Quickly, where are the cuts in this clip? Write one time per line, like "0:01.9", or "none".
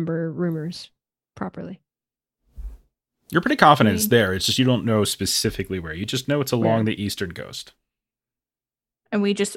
none